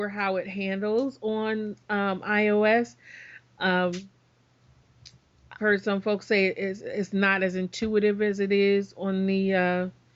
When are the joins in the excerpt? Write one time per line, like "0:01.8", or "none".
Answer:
0:05.6